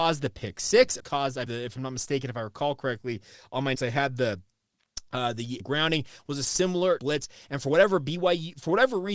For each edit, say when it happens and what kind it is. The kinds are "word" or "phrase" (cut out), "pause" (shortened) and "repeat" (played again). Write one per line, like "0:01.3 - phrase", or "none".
0:01.0 - word
0:01.5 - word
0:03.7 - word
0:05.6 - word
0:07.0 - word